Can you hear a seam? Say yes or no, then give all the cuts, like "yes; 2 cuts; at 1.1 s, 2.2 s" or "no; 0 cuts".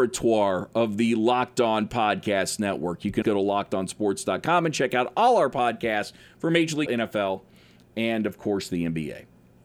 yes; 2 cuts; at 3.2 s, 6.9 s